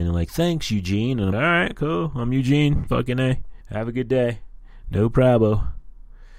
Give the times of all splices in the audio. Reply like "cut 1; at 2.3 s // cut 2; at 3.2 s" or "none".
cut 1; at 1.3 s // cut 2; at 3.6 s